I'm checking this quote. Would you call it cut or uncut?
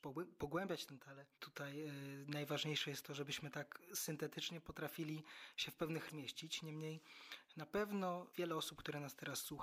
cut